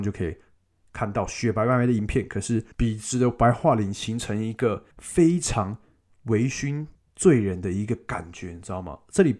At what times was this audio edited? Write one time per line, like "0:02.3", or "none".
0:02.7
0:04.9
0:06.9